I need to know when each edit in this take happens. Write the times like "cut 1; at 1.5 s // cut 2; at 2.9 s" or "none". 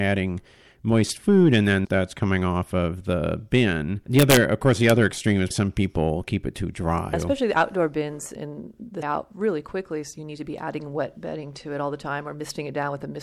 cut 1; at 1.8 s // cut 2; at 5.5 s // cut 3; at 7.1 s // cut 4; at 8.4 s // cut 5; at 9.0 s